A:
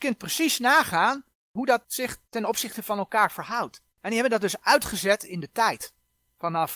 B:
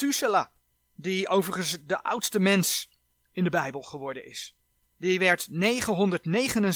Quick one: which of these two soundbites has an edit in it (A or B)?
A